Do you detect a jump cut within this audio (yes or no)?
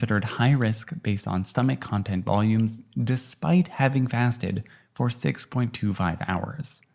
no